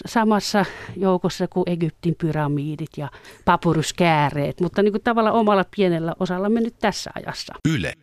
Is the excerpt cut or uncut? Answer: uncut